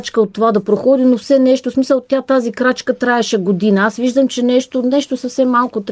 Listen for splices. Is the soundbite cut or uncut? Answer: uncut